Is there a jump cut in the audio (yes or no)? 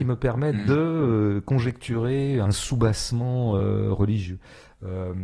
no